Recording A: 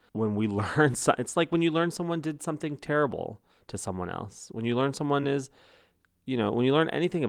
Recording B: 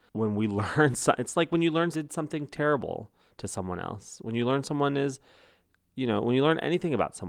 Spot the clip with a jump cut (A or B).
B